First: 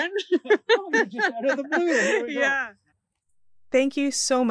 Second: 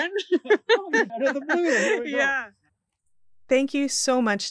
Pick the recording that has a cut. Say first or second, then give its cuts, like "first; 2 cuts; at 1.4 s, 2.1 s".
second; 1 cut; at 1.1 s